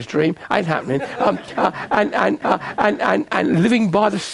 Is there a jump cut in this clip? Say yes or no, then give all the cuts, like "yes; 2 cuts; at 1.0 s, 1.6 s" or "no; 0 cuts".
yes; 1 cut; at 2.4 s